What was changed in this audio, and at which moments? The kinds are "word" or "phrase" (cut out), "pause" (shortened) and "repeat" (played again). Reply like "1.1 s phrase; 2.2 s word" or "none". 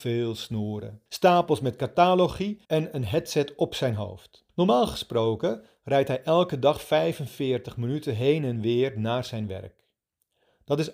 1.1 s pause; 2.6 s pause; 4.5 s pause